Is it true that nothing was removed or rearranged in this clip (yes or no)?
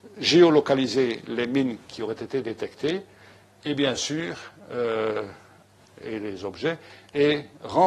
yes